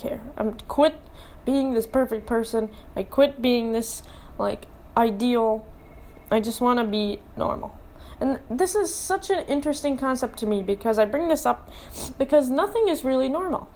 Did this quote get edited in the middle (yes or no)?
no